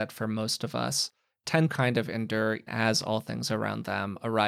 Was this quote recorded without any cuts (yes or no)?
no